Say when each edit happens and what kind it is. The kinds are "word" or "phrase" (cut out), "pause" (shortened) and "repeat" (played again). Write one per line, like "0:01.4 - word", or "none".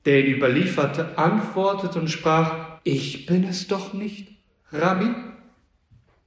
0:02.8 - pause